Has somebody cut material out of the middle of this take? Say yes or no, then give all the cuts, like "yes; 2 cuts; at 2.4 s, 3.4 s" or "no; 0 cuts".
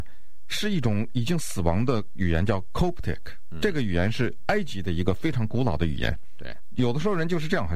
no; 0 cuts